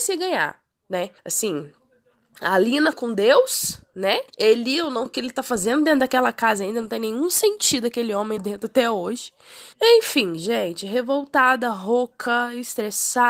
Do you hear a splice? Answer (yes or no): yes